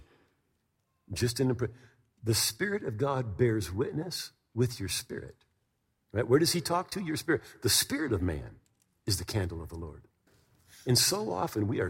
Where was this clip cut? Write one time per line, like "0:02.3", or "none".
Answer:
none